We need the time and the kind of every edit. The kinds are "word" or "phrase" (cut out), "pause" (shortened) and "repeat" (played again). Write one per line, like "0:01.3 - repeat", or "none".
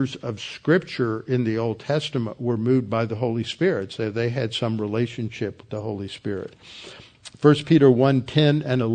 none